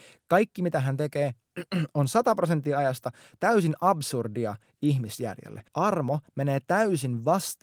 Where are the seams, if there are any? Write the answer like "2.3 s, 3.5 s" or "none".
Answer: 5.7 s